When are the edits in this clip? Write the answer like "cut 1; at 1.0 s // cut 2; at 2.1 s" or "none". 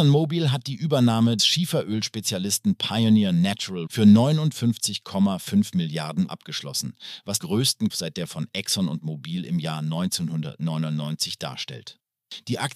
cut 1; at 1.4 s // cut 2; at 3.9 s // cut 3; at 6.3 s // cut 4; at 7.4 s // cut 5; at 7.9 s // cut 6; at 8.3 s